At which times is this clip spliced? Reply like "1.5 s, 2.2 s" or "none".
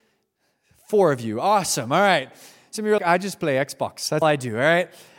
3.0 s, 4.2 s